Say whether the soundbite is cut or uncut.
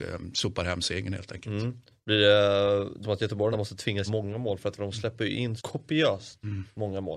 cut